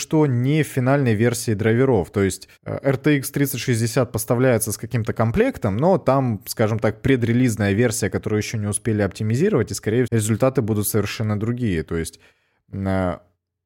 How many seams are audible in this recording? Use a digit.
2